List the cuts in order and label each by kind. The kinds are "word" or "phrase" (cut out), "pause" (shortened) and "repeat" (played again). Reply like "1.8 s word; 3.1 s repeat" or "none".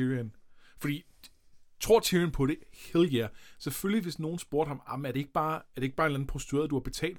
none